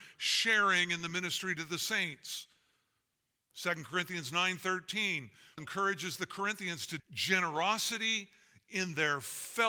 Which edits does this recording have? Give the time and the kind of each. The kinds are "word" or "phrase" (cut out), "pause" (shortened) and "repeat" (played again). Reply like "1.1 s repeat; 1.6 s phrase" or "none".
5.6 s word; 7.0 s word